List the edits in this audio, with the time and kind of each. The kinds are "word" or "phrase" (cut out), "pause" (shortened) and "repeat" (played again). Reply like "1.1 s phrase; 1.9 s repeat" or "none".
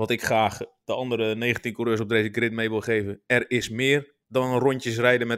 4.2 s pause